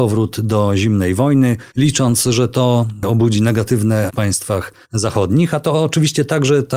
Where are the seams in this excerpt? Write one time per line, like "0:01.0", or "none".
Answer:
0:01.7
0:04.1
0:04.8